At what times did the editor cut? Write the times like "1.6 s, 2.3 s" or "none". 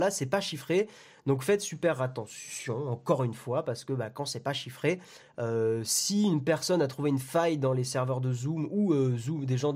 none